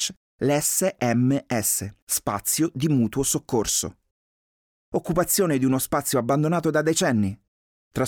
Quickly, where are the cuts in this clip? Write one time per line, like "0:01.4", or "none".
0:02.0